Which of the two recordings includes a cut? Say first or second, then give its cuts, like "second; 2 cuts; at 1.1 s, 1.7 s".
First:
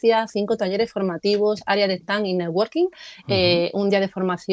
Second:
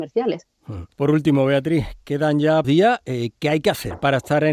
second; 2 cuts; at 0.9 s, 2.6 s